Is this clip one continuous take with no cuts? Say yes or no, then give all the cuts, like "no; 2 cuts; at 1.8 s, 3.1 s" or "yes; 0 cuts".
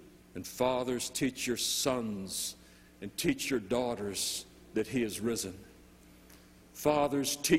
yes; 0 cuts